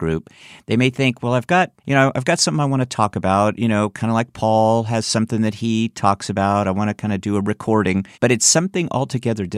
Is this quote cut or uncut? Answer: cut